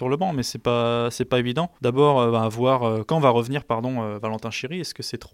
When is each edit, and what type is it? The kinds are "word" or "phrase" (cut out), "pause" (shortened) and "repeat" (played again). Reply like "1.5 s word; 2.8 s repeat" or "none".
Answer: 1.8 s pause; 3.1 s phrase